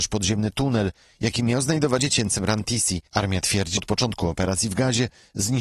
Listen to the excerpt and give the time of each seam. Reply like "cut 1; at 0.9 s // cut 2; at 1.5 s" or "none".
cut 1; at 2.0 s // cut 2; at 3.1 s // cut 3; at 3.8 s

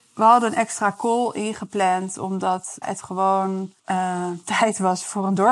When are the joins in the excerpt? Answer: cut 1; at 2.8 s // cut 2; at 3.8 s

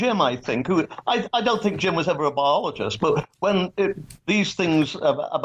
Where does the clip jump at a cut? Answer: none

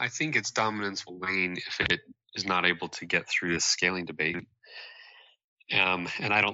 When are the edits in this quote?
none

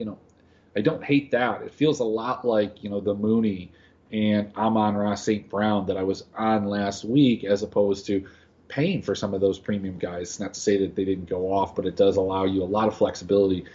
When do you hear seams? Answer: none

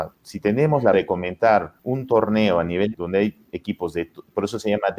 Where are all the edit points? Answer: cut 1; at 0.9 s // cut 2; at 1.8 s // cut 3; at 2.9 s

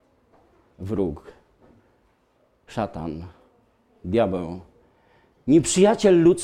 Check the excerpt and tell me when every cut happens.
none

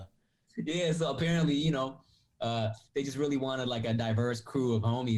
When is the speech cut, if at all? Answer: none

